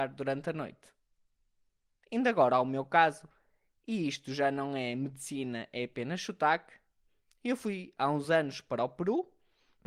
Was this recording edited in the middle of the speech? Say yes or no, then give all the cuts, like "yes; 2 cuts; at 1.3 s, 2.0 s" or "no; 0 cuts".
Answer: no; 0 cuts